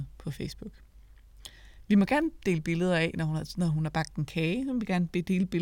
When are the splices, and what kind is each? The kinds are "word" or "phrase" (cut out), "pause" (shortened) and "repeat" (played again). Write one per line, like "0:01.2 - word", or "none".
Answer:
none